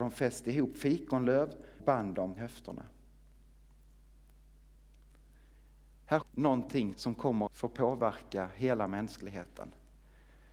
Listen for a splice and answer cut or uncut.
cut